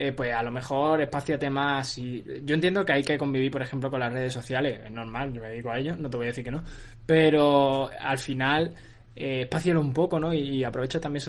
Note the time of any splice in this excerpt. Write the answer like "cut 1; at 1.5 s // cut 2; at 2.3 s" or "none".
none